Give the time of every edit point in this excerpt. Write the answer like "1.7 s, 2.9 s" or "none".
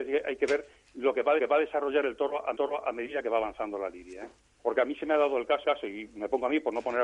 1.4 s, 2.5 s, 4.4 s, 5.6 s

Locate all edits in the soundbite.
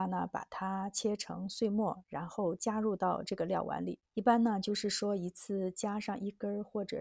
4.1 s

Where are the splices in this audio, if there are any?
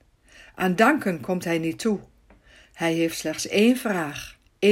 none

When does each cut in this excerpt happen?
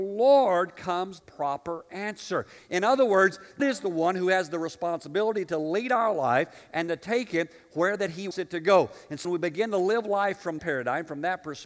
1.2 s, 3.6 s, 8.3 s, 9.2 s, 10.6 s

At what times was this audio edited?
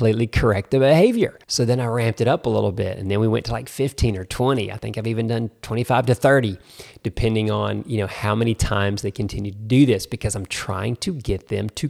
1.4 s

